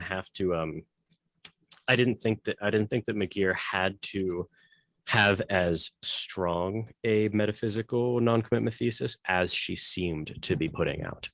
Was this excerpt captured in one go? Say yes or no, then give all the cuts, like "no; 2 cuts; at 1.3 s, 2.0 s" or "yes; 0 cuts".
yes; 0 cuts